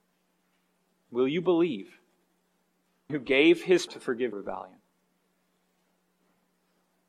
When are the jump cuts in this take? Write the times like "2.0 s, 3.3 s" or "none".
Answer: 3.1 s, 3.9 s, 4.3 s